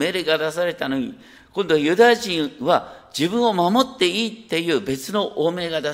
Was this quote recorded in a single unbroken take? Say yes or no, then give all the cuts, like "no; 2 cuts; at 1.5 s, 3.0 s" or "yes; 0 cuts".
yes; 0 cuts